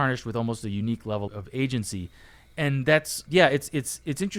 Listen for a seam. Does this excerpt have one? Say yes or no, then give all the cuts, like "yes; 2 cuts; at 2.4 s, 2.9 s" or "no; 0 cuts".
yes; 2 cuts; at 1.3 s, 3.3 s